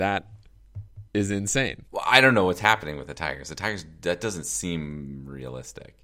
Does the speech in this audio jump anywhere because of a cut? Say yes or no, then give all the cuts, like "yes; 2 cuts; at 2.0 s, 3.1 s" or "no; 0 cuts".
yes; 2 cuts; at 1.1 s, 1.9 s